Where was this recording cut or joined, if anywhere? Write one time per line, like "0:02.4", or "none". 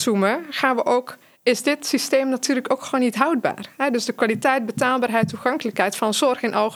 none